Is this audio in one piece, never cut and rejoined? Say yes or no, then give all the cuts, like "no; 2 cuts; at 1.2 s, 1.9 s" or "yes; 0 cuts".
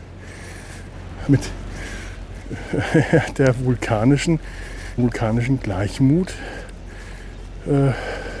no; 2 cuts; at 1.3 s, 5.0 s